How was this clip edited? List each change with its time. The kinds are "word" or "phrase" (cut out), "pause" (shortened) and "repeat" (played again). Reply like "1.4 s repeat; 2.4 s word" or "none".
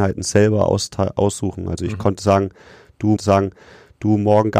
3.2 s repeat